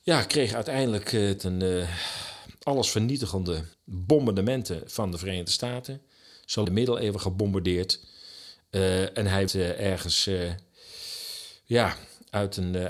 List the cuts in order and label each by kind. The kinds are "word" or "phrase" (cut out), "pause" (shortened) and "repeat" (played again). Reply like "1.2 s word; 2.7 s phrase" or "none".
1.4 s phrase; 3.7 s pause; 6.6 s phrase; 9.5 s word